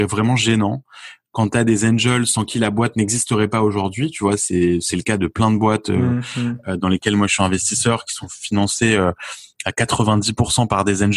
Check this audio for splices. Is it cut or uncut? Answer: uncut